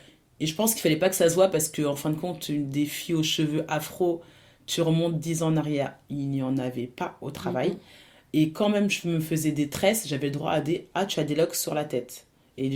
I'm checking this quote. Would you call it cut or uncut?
uncut